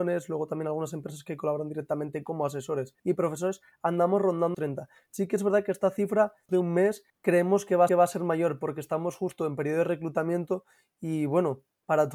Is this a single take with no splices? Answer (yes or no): no